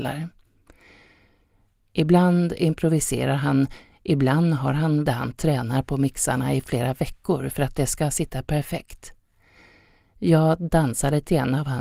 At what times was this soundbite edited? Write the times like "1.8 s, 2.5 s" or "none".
5.1 s